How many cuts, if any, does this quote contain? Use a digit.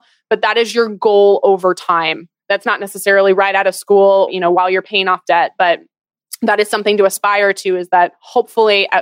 1